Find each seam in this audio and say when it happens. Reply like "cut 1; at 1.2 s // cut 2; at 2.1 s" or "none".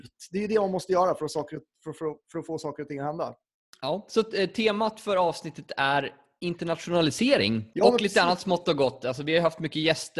none